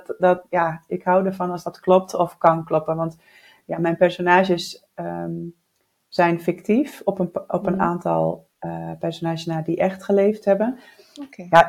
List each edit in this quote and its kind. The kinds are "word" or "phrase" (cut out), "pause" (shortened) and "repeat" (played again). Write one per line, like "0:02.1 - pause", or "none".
0:08.5 - pause